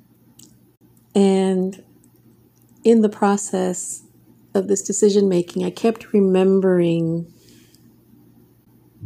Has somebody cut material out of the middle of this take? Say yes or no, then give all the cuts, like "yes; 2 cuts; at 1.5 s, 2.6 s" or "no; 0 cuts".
no; 0 cuts